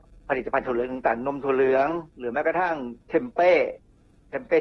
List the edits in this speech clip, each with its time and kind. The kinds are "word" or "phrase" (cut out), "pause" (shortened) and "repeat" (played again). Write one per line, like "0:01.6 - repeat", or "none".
0:03.0 - pause